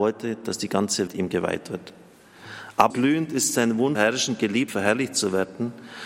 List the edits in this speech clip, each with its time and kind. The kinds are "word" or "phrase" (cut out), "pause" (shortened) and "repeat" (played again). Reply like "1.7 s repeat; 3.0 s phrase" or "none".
1.1 s word; 2.9 s word; 3.9 s word; 4.7 s word